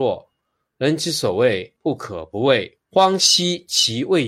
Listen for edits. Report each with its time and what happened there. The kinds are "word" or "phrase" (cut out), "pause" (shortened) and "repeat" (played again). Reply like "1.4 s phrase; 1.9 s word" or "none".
1.8 s pause; 2.8 s pause

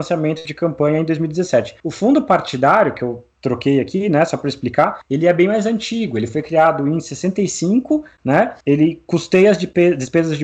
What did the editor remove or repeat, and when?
1.8 s pause; 5.0 s pause; 8.6 s pause

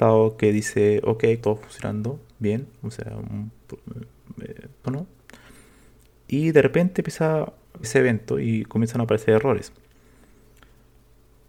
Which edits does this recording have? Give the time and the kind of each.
1.4 s word; 4.8 s word; 7.8 s word

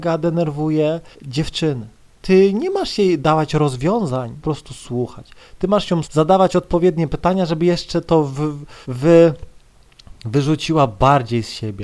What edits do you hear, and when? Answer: 1.1 s pause; 4.4 s phrase; 6.0 s word; 8.8 s pause

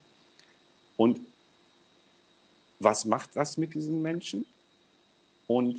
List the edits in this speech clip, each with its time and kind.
none

